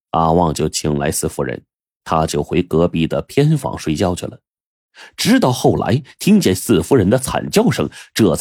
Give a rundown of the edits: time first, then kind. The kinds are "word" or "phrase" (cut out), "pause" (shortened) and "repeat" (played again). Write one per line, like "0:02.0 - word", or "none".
none